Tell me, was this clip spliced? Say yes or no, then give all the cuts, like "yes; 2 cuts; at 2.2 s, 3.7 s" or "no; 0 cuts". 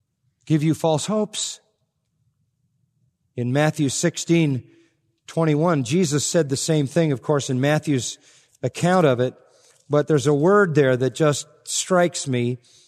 no; 0 cuts